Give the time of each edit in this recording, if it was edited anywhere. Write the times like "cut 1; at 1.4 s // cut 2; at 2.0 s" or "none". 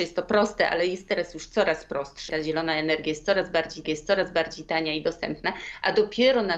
cut 1; at 2.3 s // cut 2; at 3.8 s

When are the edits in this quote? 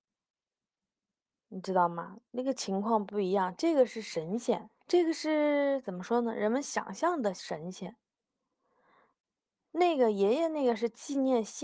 cut 1; at 4.8 s

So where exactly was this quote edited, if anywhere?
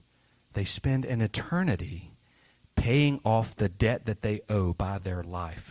none

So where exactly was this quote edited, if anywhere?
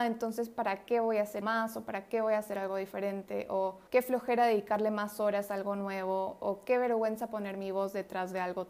cut 1; at 1.4 s // cut 2; at 3.9 s

